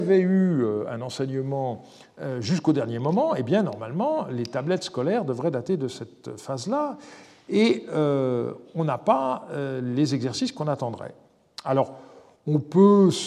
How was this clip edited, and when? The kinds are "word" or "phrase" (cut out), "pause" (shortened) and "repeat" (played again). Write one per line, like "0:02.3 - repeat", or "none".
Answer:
none